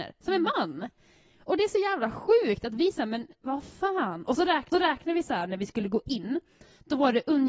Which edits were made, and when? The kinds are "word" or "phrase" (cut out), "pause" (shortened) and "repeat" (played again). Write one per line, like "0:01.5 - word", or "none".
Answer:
0:04.7 - repeat